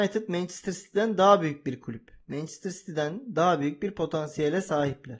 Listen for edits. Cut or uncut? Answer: uncut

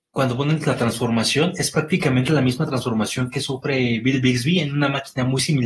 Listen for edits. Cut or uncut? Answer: uncut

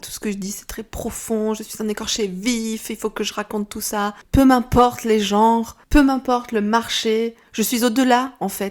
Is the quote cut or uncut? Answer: uncut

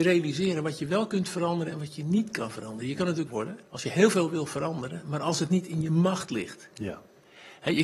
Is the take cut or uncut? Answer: cut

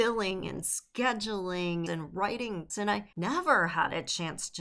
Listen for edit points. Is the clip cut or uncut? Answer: cut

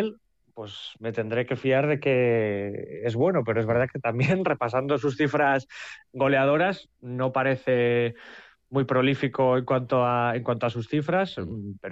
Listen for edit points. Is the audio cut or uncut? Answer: uncut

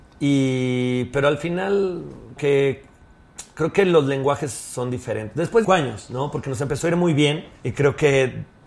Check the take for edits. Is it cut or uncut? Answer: cut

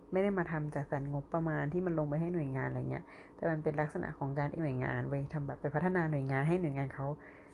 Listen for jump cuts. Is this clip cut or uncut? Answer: cut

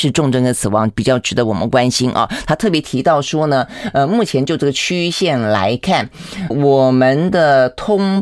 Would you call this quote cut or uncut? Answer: cut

